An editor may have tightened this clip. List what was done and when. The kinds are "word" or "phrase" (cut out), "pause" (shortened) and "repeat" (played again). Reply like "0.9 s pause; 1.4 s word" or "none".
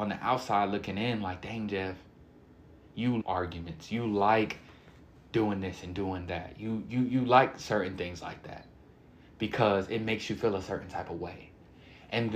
3.2 s word